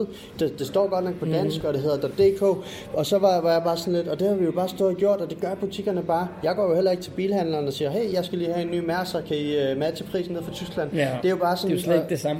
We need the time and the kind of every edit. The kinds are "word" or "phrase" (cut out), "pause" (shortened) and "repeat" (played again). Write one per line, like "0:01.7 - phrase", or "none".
none

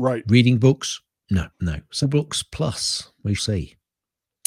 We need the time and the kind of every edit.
0:01.5 - pause
0:02.0 - phrase
0:03.4 - word

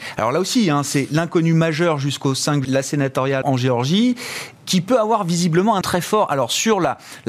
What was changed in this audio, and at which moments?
0:02.6 - word
0:03.4 - word
0:04.6 - word
0:05.8 - word

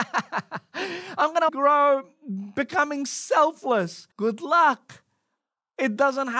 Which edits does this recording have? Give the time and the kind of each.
0:01.5 - phrase
0:04.1 - pause

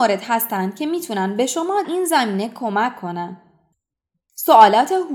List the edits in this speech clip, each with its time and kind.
0:01.8 - word

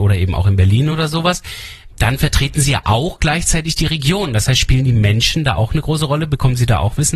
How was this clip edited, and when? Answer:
none

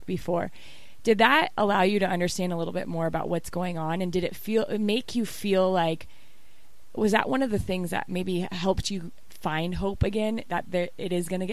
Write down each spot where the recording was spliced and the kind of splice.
none

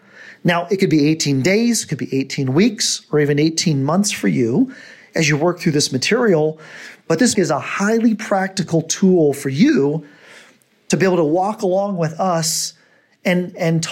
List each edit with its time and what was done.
0:07.3 - word

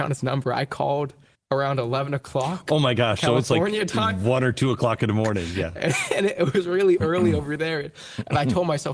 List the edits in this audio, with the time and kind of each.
0:01.4 - pause

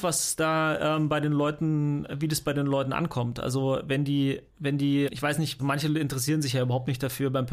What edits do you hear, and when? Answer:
0:04.5 - pause
0:05.0 - word
0:05.6 - word

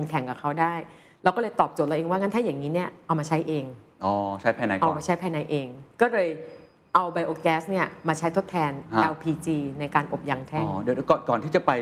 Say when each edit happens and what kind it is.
none

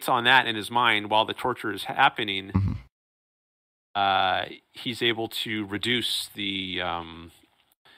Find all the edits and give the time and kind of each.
none

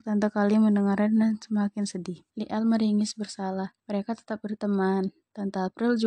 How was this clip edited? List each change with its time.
0:02.3 - pause
0:03.8 - pause

